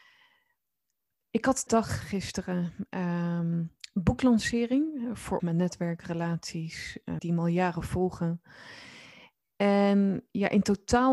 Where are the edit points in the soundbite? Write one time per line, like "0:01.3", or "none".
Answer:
0:01.7
0:02.0
0:05.4
0:07.2